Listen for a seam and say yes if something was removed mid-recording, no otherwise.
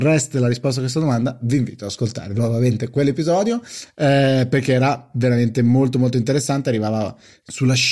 no